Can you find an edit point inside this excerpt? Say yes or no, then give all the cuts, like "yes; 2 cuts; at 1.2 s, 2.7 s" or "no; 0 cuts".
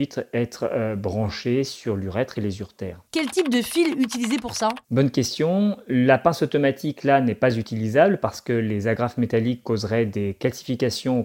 yes; 2 cuts; at 3.1 s, 4.8 s